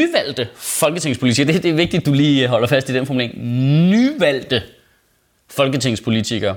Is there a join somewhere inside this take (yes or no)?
no